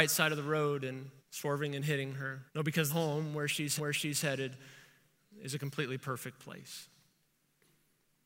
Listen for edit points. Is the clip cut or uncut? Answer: cut